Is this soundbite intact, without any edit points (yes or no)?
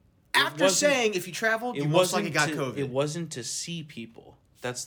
yes